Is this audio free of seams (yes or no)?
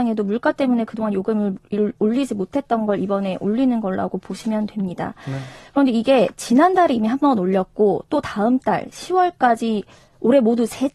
yes